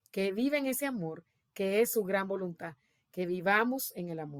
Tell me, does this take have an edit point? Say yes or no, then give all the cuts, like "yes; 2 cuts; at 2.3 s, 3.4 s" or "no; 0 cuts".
no; 0 cuts